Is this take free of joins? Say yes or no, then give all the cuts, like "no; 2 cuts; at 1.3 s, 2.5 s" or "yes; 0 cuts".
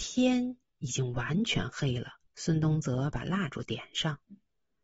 no; 1 cut; at 2.3 s